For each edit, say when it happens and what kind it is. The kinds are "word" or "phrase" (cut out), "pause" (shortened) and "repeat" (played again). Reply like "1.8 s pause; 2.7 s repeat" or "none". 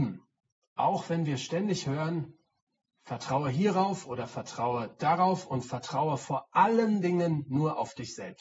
none